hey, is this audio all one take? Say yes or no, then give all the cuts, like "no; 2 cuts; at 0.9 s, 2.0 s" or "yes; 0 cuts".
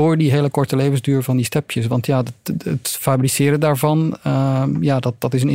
yes; 0 cuts